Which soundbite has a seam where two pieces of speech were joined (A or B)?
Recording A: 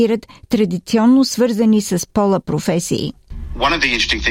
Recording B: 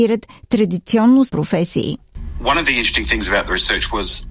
B